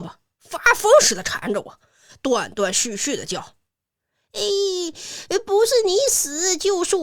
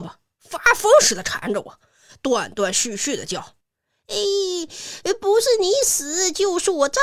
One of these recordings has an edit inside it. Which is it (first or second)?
second